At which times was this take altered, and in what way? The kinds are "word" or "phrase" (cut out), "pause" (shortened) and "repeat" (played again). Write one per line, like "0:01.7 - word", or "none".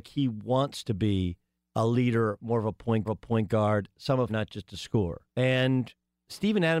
0:01.6 - pause
0:03.1 - repeat
0:04.3 - word
0:05.3 - pause